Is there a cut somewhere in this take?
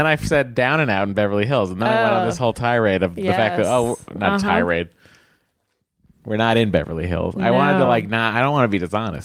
no; 0 cuts

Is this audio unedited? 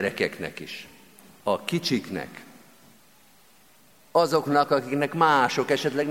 yes; 0 cuts

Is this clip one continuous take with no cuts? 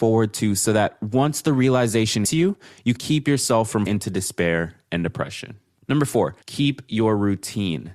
no; 4 cuts; at 2.2 s, 3.0 s, 3.9 s, 6.4 s

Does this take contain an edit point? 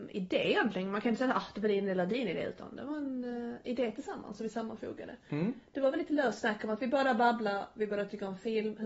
no; 0 cuts

